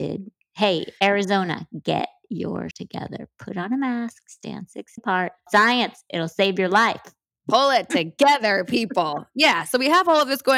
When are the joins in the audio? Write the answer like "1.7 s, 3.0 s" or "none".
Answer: 2.7 s, 5.0 s, 5.5 s, 7.2 s